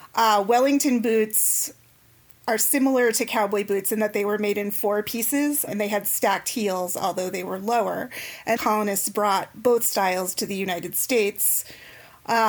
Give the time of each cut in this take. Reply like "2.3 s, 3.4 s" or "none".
5.7 s, 8.6 s